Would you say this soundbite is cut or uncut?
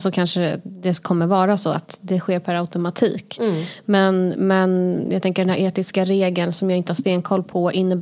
uncut